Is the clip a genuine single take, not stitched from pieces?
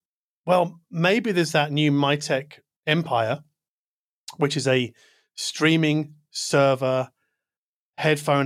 yes; 0 cuts

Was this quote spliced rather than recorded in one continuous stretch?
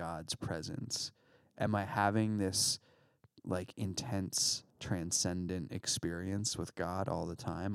yes; 1 cut; at 4.7 s

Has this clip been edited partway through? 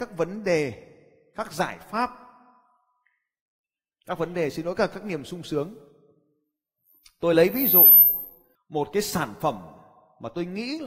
no; 0 cuts

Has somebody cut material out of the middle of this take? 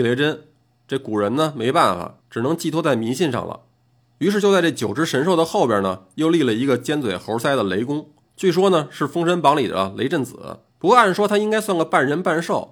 yes; 4 cuts; at 2.2 s, 3.9 s, 8.2 s, 10.7 s

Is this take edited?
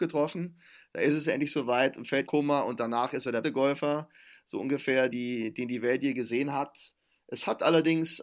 yes; 3 cuts; at 2.3 s, 3.4 s, 5.1 s

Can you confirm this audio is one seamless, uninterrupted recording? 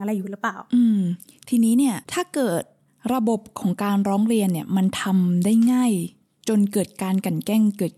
no; 1 cut; at 2.0 s

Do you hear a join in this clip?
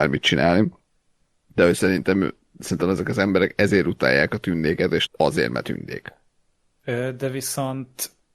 yes; 1 cut; at 5.1 s

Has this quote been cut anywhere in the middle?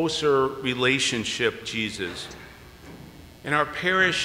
yes; 1 cut; at 1.6 s

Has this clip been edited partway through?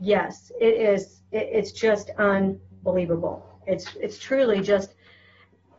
no; 0 cuts

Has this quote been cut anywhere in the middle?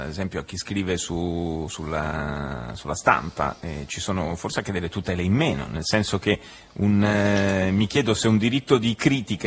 no; 0 cuts

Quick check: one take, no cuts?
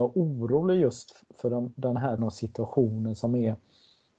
no; 1 cut; at 2.2 s

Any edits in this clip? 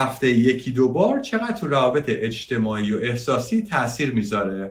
no; 0 cuts

